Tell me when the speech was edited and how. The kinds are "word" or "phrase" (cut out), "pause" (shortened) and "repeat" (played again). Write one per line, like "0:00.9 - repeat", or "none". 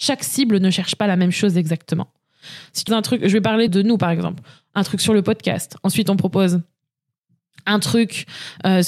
0:02.9 - word
0:03.7 - word